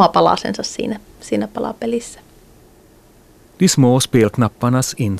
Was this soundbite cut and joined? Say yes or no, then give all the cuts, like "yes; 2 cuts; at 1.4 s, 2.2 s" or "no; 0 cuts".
no; 0 cuts